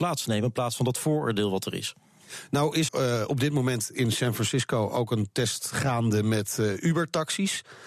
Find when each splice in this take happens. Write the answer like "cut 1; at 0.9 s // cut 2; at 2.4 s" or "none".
cut 1; at 2.9 s